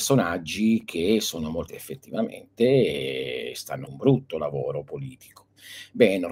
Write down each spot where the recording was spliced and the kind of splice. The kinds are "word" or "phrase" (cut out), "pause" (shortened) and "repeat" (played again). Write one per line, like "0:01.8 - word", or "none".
0:01.7 - phrase
0:03.9 - word